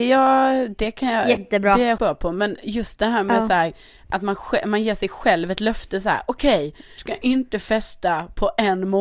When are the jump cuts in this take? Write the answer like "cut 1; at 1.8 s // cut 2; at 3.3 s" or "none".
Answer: cut 1; at 2.0 s // cut 2; at 7.0 s